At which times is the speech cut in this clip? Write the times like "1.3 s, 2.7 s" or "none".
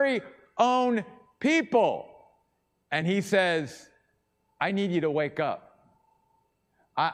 none